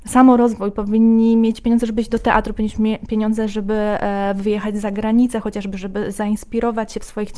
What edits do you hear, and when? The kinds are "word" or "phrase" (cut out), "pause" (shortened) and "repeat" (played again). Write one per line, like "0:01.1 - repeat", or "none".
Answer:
none